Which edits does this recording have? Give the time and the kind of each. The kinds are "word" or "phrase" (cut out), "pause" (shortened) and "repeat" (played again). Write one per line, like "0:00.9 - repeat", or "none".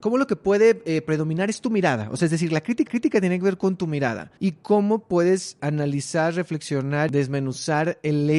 0:02.9 - repeat
0:04.4 - pause
0:05.6 - word